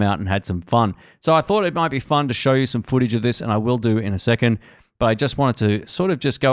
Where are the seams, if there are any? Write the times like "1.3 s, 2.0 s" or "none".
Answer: none